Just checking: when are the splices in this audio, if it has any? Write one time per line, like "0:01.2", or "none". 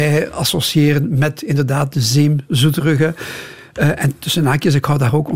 none

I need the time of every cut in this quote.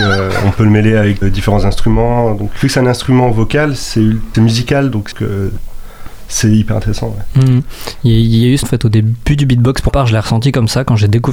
0:01.2
0:02.6
0:04.3
0:05.1
0:08.6
0:09.9

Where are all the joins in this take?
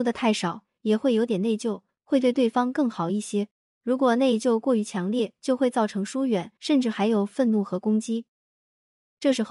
0:03.6
0:06.6

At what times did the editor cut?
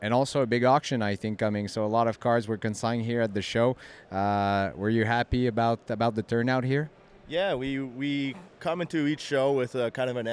none

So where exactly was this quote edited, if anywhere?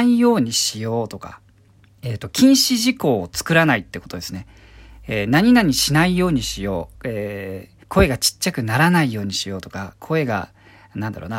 0:01.7
0:06.9
0:07.8

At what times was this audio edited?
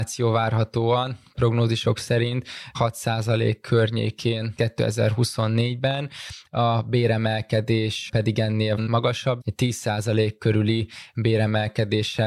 0:01.3
0:04.6
0:08.8
0:09.4

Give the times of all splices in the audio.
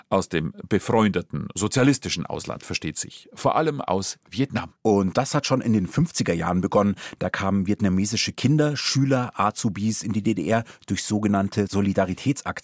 0:04.8

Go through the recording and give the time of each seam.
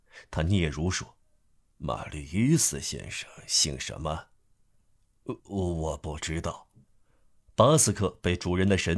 0:01.2
0:05.4
0:06.8

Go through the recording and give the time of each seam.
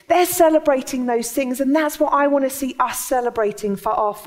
none

